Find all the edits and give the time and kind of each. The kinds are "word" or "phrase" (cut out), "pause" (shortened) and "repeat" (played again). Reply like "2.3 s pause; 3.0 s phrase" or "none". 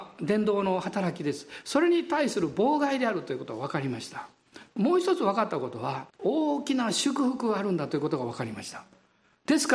6.1 s pause